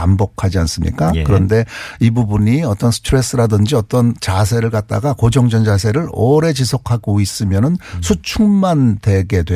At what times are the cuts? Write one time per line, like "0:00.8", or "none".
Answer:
none